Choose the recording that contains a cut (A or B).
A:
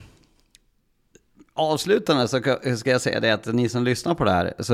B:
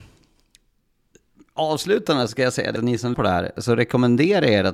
B